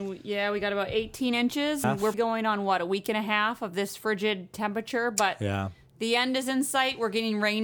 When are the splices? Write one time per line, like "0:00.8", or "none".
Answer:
0:01.8
0:02.1

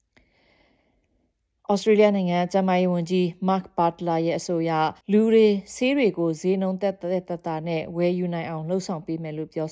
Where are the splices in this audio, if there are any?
0:05.0

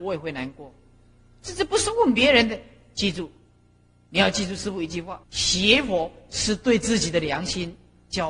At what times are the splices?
0:05.2

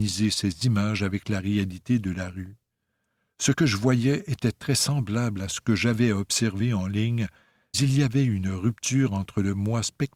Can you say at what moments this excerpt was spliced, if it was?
0:07.7

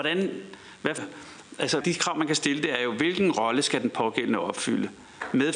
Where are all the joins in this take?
0:01.0
0:01.8

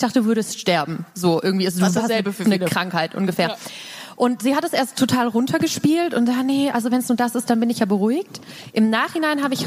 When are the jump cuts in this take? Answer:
none

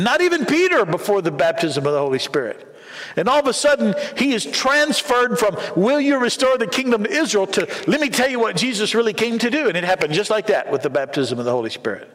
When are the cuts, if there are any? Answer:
none

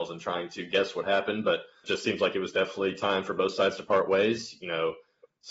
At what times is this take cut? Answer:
0:01.8

